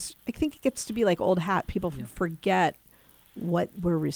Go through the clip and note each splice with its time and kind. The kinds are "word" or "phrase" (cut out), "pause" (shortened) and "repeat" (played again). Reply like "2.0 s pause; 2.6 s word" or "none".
none

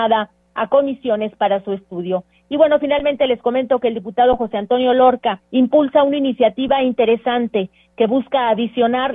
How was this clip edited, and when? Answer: 5.4 s pause

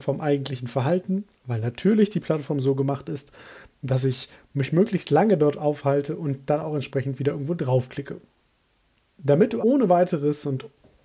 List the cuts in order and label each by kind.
9.6 s word

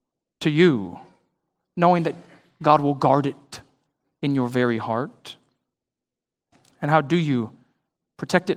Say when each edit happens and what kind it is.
none

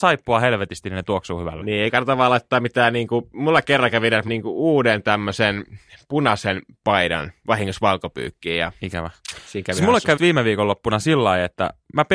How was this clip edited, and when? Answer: 4.3 s word; 10.2 s word

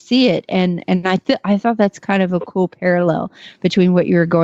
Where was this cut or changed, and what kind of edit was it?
none

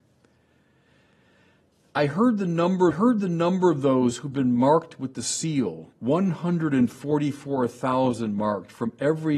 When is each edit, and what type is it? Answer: 2.9 s repeat; 5.9 s pause

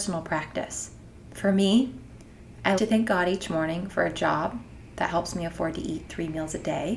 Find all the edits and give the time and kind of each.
2.8 s word

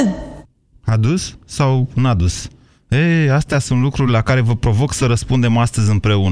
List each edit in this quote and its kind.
none

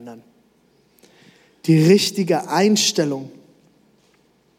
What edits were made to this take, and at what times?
none

